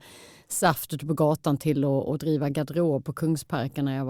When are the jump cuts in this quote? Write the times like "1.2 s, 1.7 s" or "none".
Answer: none